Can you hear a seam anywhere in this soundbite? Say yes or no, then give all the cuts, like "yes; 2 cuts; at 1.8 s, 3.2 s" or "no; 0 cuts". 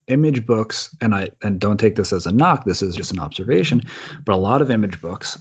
yes; 1 cut; at 3.0 s